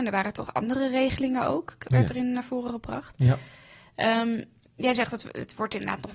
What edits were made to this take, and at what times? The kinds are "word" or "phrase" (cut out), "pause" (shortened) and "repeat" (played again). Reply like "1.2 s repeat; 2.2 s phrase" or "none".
none